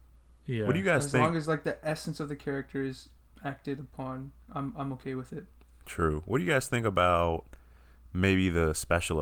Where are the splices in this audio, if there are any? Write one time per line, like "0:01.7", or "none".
none

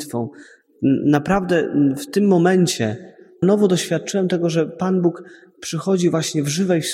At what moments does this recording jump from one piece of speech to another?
0:03.4

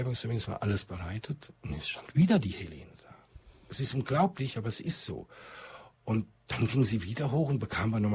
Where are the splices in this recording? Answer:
none

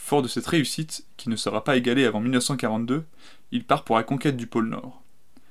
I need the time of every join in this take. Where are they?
none

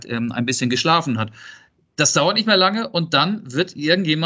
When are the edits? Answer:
none

